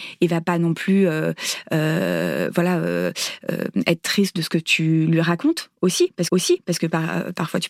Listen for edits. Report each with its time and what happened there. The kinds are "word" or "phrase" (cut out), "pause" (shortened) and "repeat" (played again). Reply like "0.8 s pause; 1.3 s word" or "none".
6.3 s repeat